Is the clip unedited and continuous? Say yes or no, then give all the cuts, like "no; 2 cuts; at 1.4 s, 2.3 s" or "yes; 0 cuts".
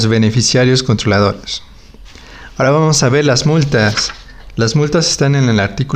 yes; 0 cuts